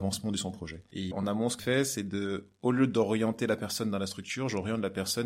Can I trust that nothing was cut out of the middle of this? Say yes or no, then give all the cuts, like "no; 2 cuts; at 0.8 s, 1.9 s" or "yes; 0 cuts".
no; 2 cuts; at 1.1 s, 1.6 s